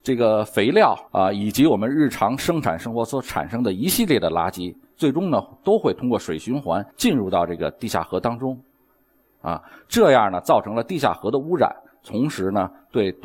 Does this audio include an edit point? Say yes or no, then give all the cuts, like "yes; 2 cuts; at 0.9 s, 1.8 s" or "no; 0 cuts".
yes; 2 cuts; at 1.1 s, 6.9 s